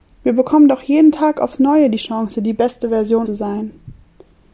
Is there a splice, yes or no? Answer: yes